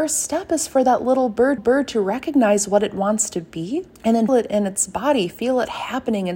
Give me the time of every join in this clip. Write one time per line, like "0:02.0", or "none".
0:01.6
0:03.9
0:04.3

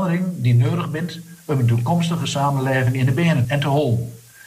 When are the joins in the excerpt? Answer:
0:03.4

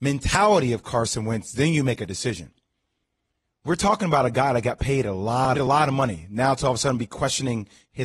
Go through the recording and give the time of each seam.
0:05.6

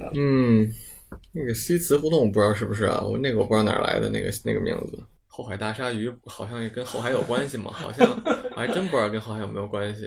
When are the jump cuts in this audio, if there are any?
0:05.2

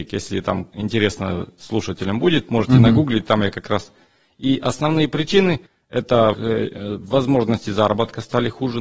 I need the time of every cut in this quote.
0:05.7
0:06.3

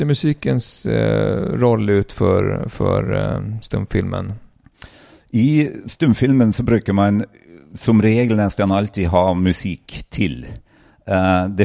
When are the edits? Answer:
none

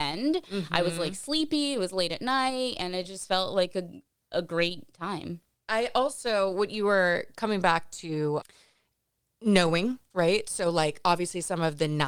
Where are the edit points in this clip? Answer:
none

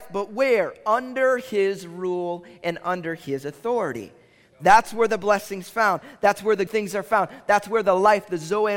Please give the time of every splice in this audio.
0:06.7

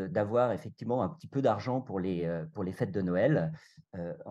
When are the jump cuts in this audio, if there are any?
none

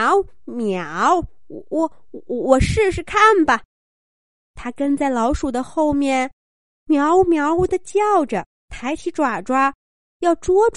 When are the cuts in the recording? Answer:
0:08.5

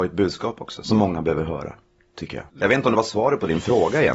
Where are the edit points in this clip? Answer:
0:01.9
0:02.5

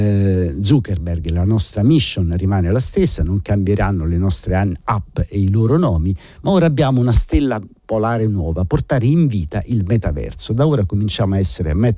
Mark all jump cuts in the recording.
none

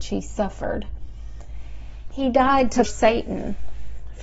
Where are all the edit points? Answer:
0:02.8

